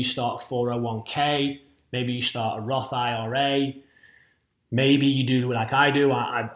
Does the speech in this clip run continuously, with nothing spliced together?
yes; 0 cuts

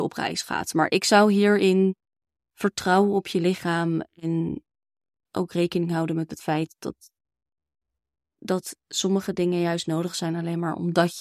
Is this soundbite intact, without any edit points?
yes; 0 cuts

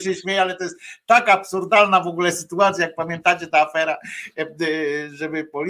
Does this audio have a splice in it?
no; 0 cuts

